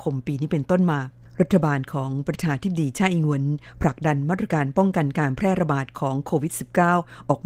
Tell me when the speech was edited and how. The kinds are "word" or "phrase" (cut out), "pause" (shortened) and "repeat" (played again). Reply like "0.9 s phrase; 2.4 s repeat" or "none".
none

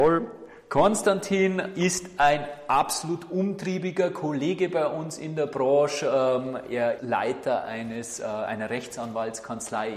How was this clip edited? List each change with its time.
7.0 s word

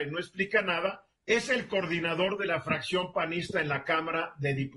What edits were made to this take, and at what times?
1.2 s pause

